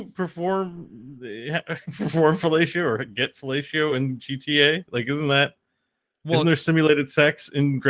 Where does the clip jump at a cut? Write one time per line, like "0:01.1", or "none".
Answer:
none